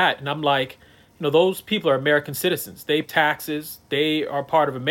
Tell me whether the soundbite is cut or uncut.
cut